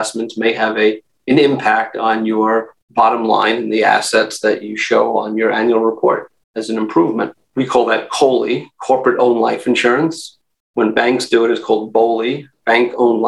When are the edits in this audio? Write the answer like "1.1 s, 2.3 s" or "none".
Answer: 2.8 s, 6.4 s, 7.4 s